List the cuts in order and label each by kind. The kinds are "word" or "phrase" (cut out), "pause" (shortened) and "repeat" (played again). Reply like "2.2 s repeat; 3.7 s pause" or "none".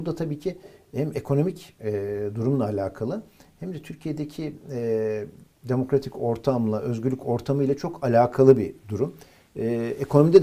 none